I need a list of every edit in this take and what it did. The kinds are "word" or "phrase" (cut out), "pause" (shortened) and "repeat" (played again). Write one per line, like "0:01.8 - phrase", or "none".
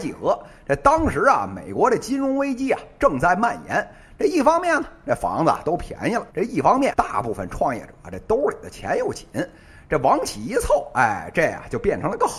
0:06.3 - pause
0:06.9 - word